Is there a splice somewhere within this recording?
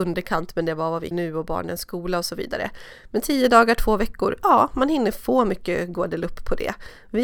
yes; 1 cut; at 1.1 s

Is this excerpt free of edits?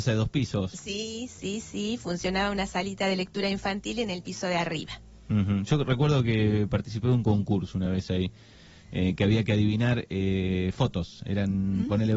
yes; 0 cuts

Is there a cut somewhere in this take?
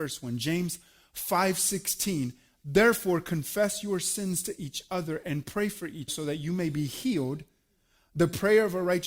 yes; 1 cut; at 6.1 s

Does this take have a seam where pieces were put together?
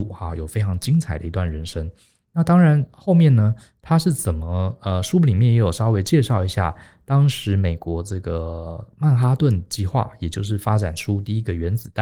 no; 0 cuts

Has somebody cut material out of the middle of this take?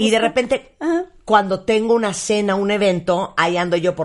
no; 0 cuts

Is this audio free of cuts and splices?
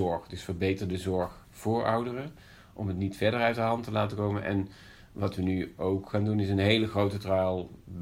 yes; 0 cuts

